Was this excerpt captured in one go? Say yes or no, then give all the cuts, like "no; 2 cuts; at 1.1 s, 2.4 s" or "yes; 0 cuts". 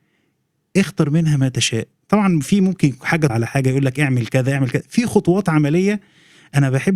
no; 1 cut; at 3.3 s